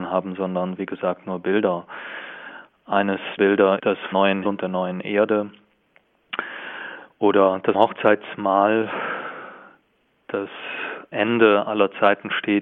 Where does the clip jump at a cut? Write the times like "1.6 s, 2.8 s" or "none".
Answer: 3.4 s, 3.8 s, 4.1 s, 4.4 s, 7.7 s, 11.1 s